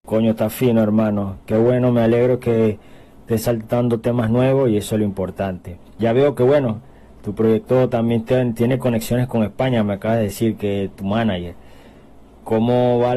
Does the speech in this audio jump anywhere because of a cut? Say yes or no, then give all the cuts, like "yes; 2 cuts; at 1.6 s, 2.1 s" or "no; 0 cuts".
yes; 1 cut; at 5.9 s